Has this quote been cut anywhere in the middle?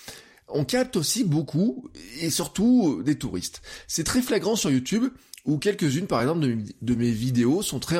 no; 0 cuts

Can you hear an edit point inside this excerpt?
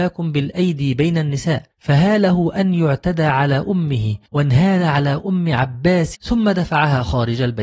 yes; 3 cuts; at 1.7 s, 4.3 s, 6.1 s

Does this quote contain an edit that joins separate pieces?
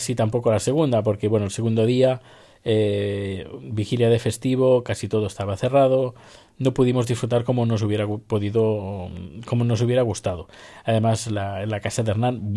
no; 0 cuts

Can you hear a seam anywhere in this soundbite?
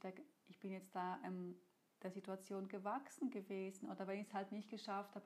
no; 0 cuts

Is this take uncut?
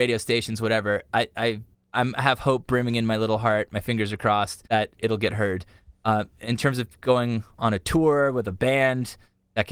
no; 2 cuts; at 1.7 s, 4.7 s

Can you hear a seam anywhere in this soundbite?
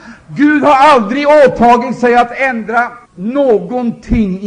yes; 1 cut; at 3.1 s

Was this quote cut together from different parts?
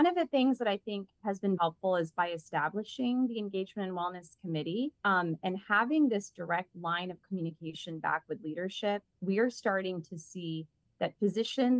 yes; 2 cuts; at 1.6 s, 5.0 s

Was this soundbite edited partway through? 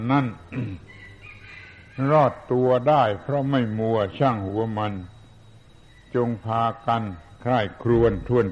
no; 0 cuts

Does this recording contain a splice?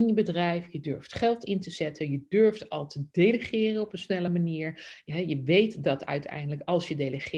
no; 0 cuts

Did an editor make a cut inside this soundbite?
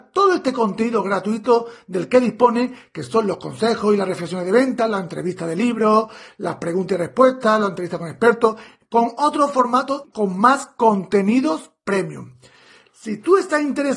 no; 0 cuts

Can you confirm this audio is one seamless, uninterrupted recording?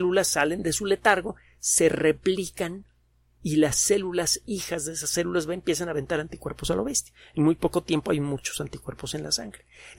yes; 0 cuts

